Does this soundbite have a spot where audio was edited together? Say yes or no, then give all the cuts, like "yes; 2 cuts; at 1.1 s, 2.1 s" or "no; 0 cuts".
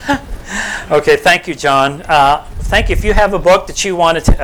no; 0 cuts